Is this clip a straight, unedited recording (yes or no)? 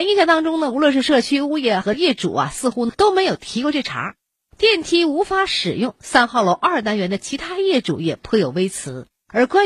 yes